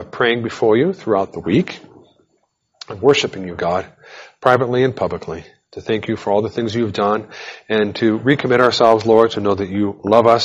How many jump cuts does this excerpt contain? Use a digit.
0